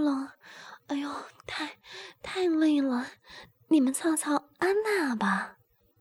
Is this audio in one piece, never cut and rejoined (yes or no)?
yes